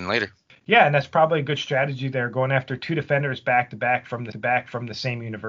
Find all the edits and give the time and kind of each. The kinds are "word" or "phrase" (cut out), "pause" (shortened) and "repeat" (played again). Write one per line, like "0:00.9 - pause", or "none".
0:04.3 - repeat